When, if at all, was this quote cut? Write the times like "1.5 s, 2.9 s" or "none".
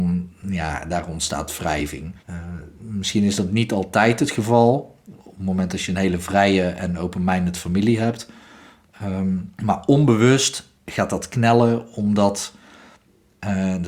2.2 s, 9.6 s, 10.8 s